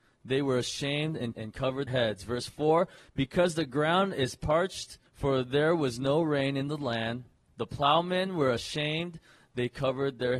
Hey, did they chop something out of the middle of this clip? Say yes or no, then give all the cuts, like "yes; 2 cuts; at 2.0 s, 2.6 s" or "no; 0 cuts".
yes; 3 cuts; at 1.3 s, 1.9 s, 5.1 s